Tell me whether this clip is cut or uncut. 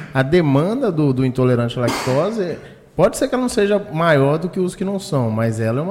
uncut